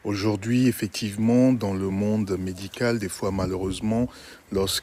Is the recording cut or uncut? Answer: uncut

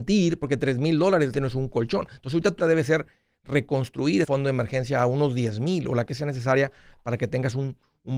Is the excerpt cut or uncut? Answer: cut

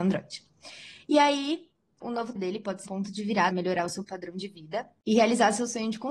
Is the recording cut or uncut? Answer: cut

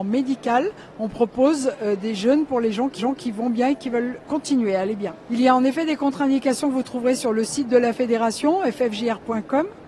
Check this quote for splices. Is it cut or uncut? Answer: cut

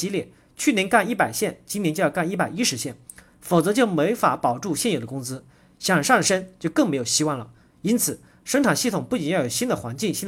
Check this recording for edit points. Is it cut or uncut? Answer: uncut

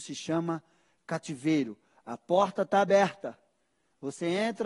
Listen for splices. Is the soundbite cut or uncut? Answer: uncut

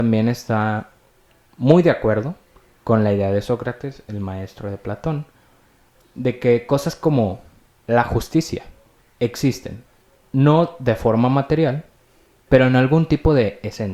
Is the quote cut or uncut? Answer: uncut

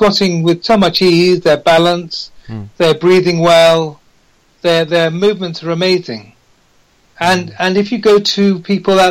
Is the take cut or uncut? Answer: uncut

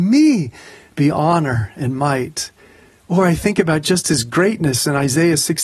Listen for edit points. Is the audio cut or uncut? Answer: uncut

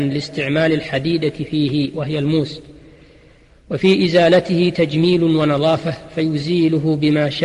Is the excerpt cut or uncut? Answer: uncut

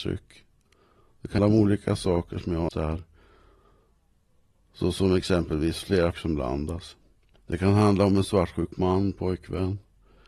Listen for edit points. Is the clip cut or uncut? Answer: cut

